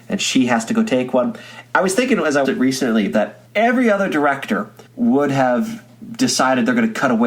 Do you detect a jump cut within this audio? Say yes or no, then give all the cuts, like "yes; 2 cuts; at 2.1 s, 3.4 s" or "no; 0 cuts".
yes; 3 cuts; at 2.4 s, 3.5 s, 4.9 s